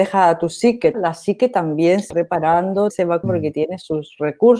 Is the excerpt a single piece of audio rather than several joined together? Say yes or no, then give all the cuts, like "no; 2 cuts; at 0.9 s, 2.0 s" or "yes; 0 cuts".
no; 4 cuts; at 0.9 s, 2.1 s, 2.9 s, 3.2 s